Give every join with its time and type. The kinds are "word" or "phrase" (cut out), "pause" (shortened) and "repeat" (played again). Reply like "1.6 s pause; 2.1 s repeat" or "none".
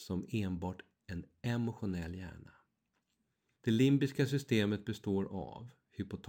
none